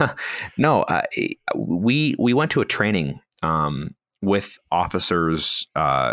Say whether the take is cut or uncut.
cut